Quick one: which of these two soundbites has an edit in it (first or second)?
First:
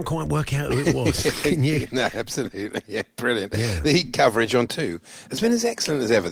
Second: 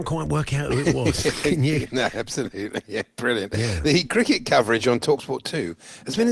first